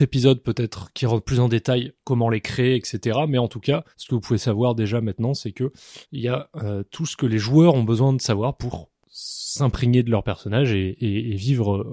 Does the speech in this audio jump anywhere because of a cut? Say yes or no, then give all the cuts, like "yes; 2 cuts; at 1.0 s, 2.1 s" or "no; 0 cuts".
yes; 2 cuts; at 3.9 s, 6.0 s